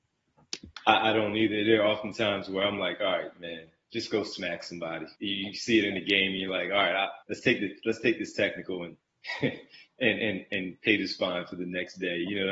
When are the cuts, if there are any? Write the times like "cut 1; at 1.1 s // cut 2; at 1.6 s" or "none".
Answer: cut 1; at 5.2 s // cut 2; at 7.2 s // cut 3; at 9.0 s